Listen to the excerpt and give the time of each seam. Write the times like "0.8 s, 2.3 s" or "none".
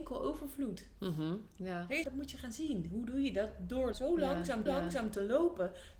2.0 s, 3.9 s, 4.7 s

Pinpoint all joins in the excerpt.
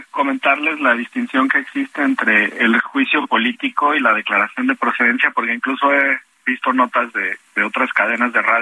none

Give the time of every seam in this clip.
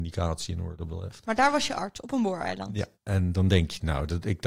2.9 s

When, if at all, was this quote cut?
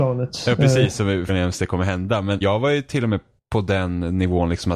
1.3 s, 2.4 s, 3.4 s

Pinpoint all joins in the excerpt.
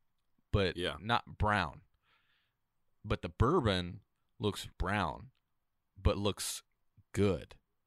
4.7 s

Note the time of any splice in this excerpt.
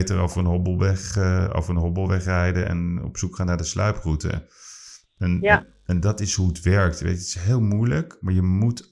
none

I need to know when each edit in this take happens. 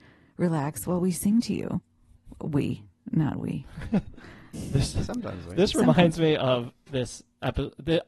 4.5 s

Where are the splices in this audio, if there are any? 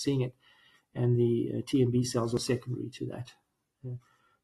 none

